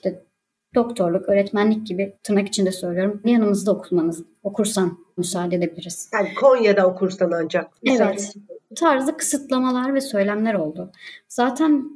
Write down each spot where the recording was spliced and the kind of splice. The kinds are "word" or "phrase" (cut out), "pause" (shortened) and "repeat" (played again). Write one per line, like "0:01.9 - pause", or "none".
0:02.1 - pause
0:03.2 - phrase
0:05.2 - word